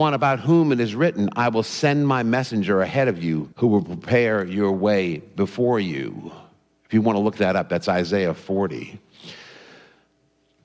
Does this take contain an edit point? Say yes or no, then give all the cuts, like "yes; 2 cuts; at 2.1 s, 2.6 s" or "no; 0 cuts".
yes; 1 cut; at 3.5 s